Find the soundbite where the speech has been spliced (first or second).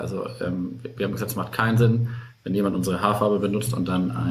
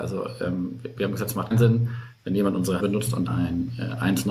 second